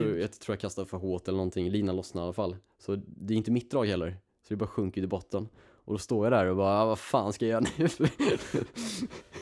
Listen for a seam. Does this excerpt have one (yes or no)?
no